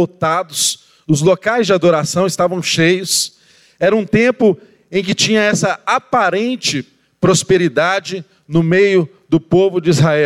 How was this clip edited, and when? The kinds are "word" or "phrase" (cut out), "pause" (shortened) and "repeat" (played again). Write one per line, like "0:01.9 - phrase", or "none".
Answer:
none